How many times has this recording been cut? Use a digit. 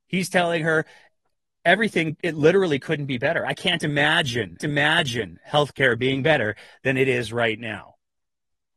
2